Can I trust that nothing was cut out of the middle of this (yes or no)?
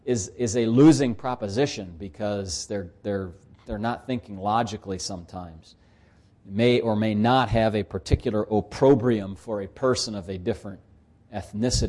yes